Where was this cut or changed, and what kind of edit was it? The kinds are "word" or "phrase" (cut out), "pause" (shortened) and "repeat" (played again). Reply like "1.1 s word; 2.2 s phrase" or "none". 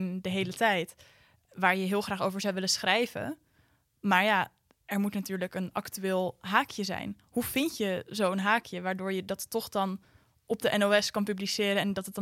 none

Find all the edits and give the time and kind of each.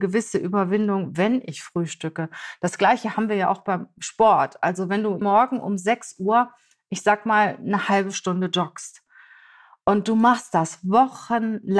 5.2 s word

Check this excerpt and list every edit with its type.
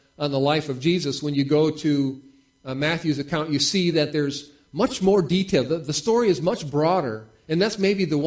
none

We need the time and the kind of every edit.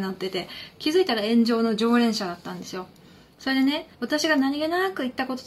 3.9 s pause

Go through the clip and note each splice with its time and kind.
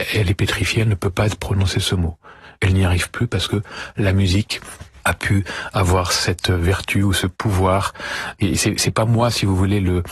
none

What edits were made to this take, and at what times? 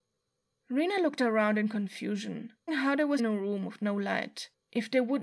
2.7 s word; 3.2 s phrase

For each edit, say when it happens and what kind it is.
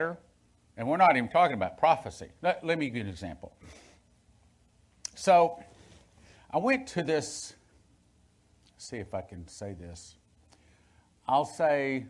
none

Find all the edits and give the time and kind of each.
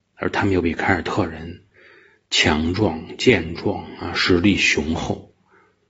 none

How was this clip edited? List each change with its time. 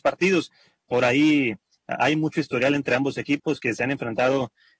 none

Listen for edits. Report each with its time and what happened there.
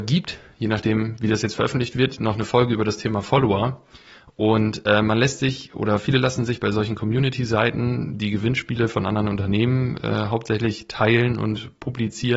none

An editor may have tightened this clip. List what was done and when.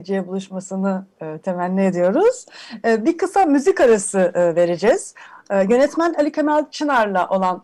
none

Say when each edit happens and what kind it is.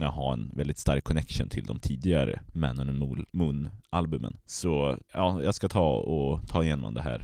3.3 s pause; 5.0 s pause

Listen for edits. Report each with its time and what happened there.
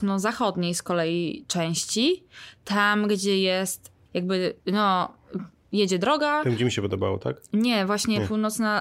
4.1 s word; 4.6 s pause

